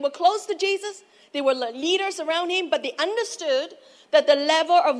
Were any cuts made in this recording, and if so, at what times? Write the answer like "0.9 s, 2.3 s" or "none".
none